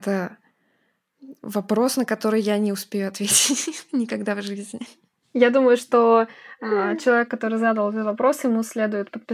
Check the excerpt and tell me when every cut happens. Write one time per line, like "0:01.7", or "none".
none